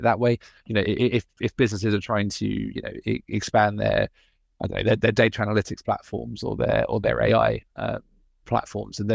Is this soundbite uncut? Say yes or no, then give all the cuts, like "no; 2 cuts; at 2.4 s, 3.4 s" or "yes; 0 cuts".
yes; 0 cuts